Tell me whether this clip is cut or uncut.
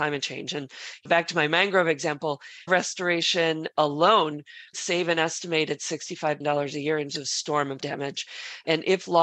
cut